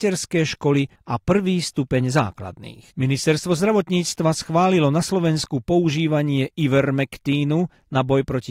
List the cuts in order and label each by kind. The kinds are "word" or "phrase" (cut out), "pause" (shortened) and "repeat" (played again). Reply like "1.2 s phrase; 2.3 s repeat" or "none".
2.9 s pause